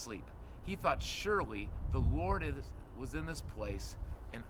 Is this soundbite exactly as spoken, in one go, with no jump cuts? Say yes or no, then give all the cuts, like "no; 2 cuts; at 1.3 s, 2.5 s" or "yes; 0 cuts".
yes; 0 cuts